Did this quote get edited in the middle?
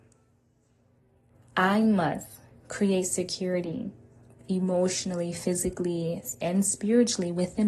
no; 0 cuts

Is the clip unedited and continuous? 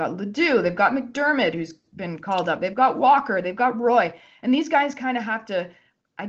yes; 0 cuts

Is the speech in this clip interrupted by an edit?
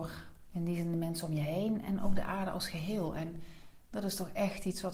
no; 0 cuts

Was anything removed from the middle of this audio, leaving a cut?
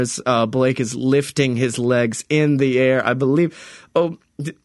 no; 0 cuts

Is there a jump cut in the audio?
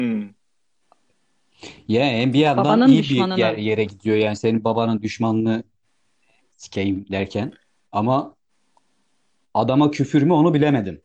no; 0 cuts

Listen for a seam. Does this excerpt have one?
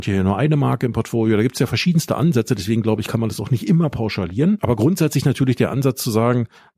no; 0 cuts

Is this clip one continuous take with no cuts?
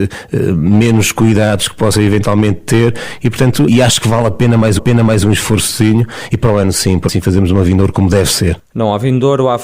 no; 3 cuts; at 3.7 s, 4.8 s, 7.1 s

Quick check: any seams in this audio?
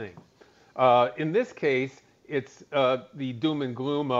no; 0 cuts

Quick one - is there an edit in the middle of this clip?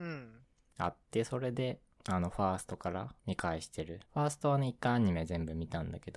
yes; 3 cuts; at 2.0 s, 3.2 s, 4.1 s

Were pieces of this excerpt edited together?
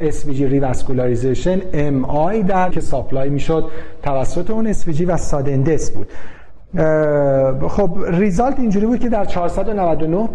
yes; 1 cut; at 2.7 s

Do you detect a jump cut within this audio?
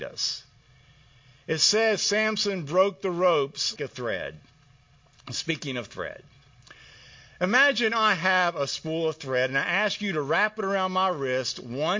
yes; 1 cut; at 3.8 s

